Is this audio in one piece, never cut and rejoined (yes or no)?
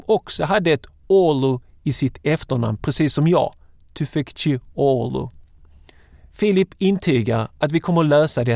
yes